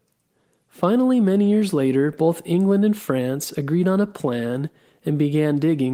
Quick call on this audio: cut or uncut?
uncut